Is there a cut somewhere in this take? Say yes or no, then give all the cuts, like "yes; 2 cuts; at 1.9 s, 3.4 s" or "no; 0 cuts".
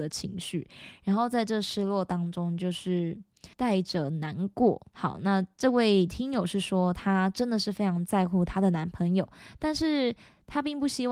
yes; 2 cuts; at 3.5 s, 4.9 s